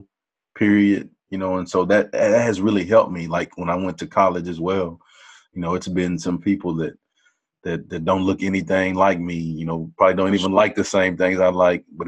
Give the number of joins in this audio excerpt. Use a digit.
0